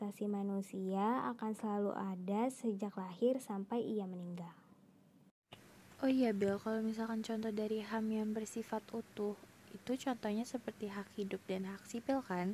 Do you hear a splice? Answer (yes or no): no